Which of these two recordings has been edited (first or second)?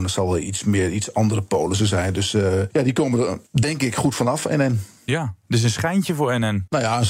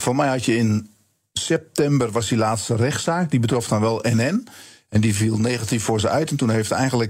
first